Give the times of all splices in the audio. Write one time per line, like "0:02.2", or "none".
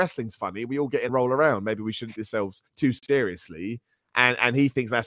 0:01.1
0:02.2
0:02.7